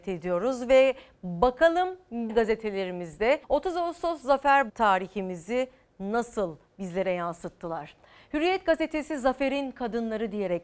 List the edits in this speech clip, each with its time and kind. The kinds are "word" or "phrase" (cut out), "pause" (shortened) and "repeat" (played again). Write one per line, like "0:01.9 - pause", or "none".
0:02.3 - word
0:03.4 - pause
0:04.7 - word